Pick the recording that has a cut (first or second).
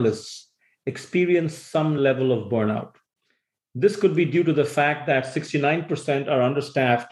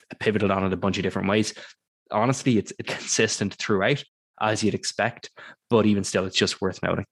second